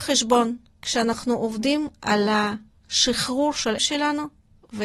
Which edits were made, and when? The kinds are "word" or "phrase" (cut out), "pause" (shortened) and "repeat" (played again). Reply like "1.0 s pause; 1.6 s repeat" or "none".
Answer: 3.8 s word